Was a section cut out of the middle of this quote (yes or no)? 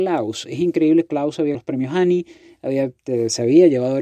yes